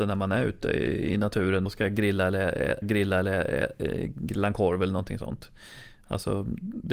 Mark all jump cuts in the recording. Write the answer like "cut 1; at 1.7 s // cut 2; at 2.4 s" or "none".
cut 1; at 1.7 s // cut 2; at 2.8 s